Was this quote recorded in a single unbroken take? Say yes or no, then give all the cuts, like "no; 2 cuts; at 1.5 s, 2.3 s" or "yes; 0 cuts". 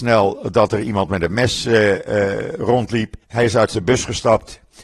no; 1 cut; at 3.2 s